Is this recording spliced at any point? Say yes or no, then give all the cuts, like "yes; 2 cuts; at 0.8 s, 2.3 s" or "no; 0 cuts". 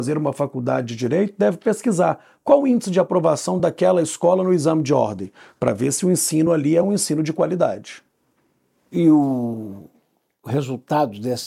no; 0 cuts